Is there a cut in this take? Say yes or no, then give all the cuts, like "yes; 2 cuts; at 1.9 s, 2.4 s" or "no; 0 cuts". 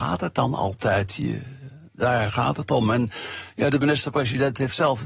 no; 0 cuts